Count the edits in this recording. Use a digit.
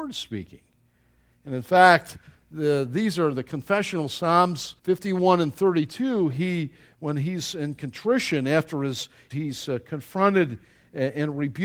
2